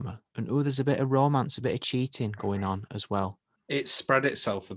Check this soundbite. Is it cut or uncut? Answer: uncut